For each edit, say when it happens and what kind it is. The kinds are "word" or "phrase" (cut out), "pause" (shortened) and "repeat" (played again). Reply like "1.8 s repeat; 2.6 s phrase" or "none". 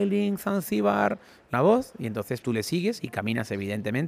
1.5 s phrase; 2.4 s word